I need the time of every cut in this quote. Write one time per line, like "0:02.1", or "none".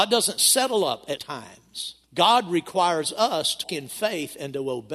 0:01.2
0:02.0
0:03.6